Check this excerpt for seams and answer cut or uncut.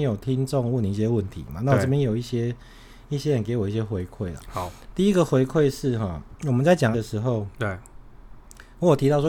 cut